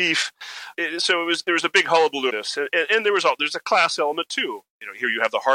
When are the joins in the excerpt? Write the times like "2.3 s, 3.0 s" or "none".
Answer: 2.3 s